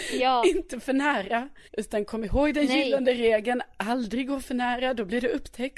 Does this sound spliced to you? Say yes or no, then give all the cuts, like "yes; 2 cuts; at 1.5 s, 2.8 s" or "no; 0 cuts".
yes; 1 cut; at 1.7 s